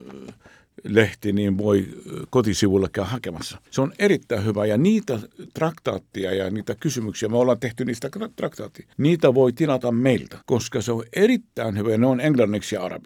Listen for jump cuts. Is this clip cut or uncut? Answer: cut